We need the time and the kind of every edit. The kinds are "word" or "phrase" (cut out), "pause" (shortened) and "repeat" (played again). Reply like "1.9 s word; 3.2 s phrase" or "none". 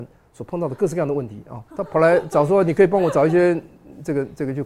1.7 s pause